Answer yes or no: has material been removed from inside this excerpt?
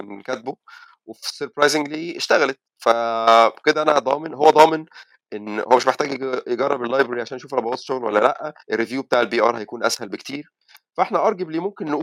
yes